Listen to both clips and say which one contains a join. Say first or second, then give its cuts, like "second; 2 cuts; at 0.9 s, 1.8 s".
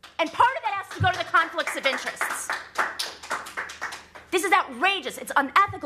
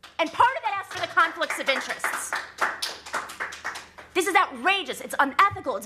second; 1 cut; at 0.9 s